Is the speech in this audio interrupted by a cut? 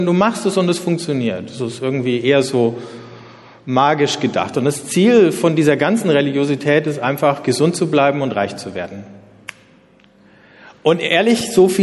no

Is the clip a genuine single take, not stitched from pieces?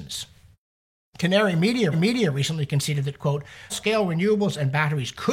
no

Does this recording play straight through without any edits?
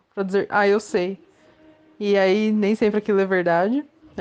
yes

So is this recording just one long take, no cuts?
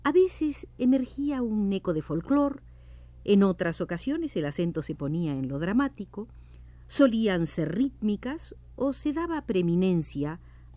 yes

